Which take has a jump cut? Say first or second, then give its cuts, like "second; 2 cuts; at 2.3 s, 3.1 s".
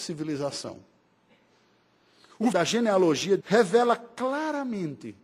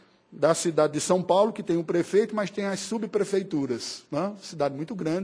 first; 2 cuts; at 2.5 s, 3.4 s